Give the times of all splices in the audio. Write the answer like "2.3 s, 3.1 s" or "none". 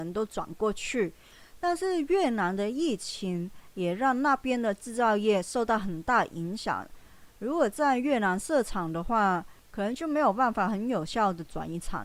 9.6 s